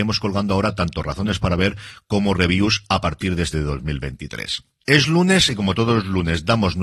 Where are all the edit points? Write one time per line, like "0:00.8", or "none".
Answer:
0:03.5